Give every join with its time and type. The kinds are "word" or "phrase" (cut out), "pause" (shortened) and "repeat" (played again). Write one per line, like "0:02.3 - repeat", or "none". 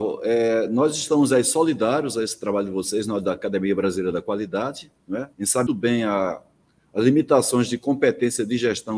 0:05.3 - pause
0:05.7 - word

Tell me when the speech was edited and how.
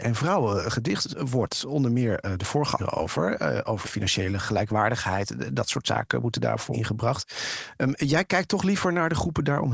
0:02.8 - phrase
0:03.8 - word
0:06.7 - word

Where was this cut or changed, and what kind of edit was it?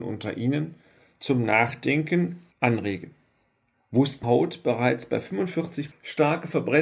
0:04.2 - phrase
0:05.9 - word

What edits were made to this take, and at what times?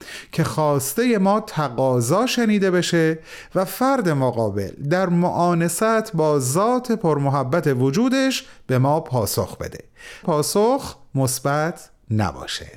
0:10.2 - phrase

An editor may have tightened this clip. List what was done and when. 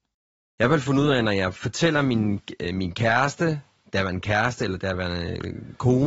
none

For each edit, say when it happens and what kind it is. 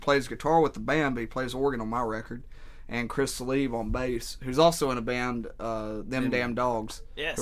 none

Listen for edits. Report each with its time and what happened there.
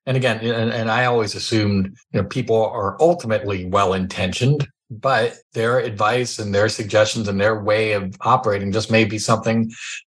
0:02.0 - pause
0:05.4 - pause

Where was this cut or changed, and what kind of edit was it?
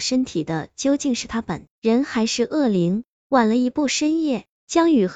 0:01.7 - pause

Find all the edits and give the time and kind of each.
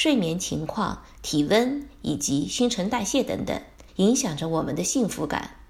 0:03.9 - pause

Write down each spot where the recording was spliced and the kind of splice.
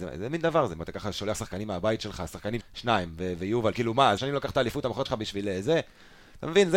0:01.3 - word
0:02.6 - word
0:03.7 - phrase
0:04.2 - phrase
0:05.1 - word

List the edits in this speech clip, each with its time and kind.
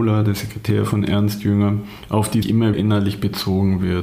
0:02.4 - word
0:02.7 - word

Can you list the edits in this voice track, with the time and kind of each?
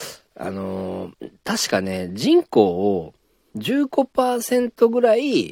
0:01.1 - pause

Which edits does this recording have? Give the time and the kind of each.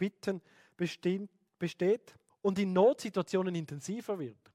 0:02.3 - pause

